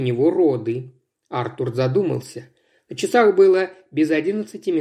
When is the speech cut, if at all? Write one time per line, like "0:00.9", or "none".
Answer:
none